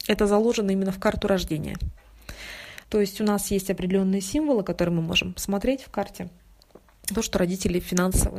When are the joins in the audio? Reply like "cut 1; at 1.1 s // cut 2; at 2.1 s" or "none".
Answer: cut 1; at 2.8 s // cut 2; at 7.1 s